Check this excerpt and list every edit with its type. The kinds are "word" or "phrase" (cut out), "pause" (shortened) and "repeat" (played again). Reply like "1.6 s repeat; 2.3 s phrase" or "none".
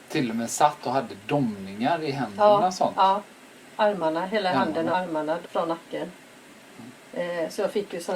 4.9 s word; 5.4 s word